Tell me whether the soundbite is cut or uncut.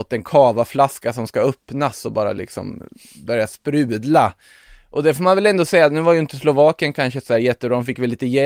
uncut